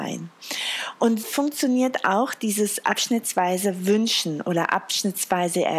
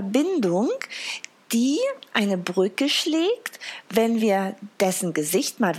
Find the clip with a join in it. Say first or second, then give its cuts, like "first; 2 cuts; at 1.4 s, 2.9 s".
first; 1 cut; at 1.2 s